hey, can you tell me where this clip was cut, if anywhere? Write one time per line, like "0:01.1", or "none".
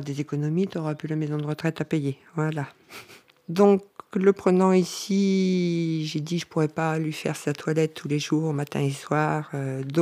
none